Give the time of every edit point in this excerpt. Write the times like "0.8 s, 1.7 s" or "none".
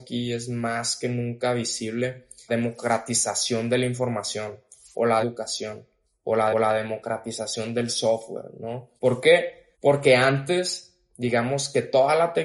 2.5 s, 5.2 s, 6.5 s, 9.0 s, 9.7 s